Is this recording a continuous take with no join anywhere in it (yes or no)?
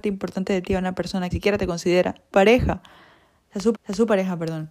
no